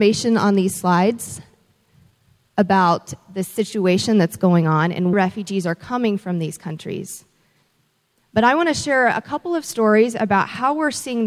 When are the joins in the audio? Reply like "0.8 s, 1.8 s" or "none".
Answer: 5.1 s